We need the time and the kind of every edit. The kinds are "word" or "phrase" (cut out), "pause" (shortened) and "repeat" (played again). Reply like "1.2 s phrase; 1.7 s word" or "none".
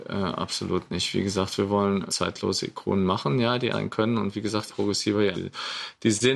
2.1 s word; 3.7 s word; 4.7 s word; 5.3 s word